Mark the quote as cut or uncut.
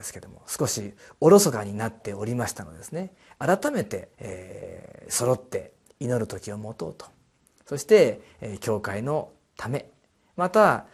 cut